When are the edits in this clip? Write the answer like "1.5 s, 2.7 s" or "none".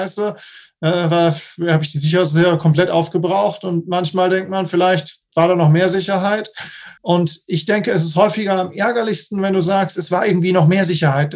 7.0 s